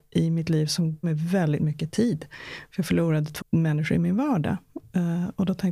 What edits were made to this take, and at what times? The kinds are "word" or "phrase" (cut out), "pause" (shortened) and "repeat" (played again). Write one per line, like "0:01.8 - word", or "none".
0:01.0 - word
0:03.4 - word

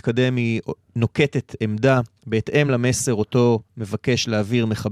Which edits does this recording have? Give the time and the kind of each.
none

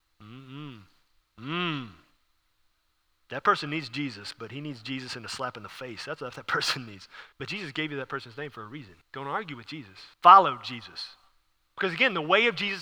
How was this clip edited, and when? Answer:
0:07.3 - pause
0:09.0 - pause
0:10.1 - pause

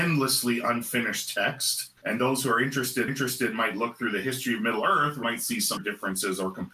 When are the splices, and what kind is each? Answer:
0:02.0 - pause
0:03.1 - repeat
0:05.2 - word
0:05.8 - word

